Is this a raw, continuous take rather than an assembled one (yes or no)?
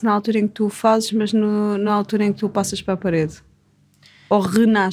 yes